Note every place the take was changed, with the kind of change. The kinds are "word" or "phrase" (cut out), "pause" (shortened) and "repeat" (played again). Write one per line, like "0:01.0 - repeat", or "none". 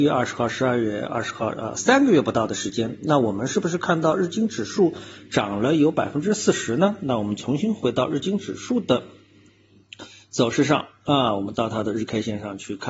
none